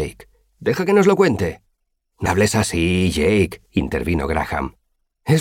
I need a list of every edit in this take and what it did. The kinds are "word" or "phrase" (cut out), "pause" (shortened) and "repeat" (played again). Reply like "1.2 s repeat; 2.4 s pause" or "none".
2.3 s word; 3.7 s pause

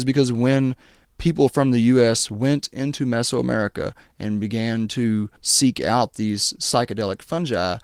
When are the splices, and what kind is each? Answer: 1.0 s pause; 5.4 s pause

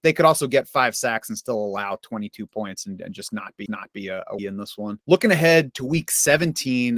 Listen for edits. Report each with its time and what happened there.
3.7 s repeat; 4.4 s phrase

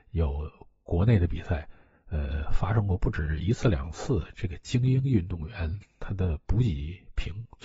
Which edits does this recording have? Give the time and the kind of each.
none

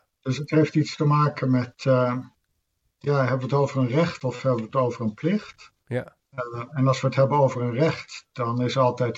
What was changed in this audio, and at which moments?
none

